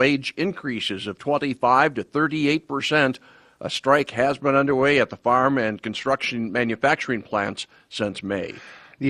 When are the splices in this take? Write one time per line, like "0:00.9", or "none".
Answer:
none